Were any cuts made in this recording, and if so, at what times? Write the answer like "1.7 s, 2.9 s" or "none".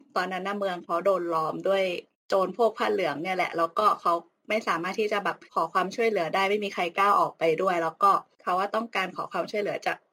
5.5 s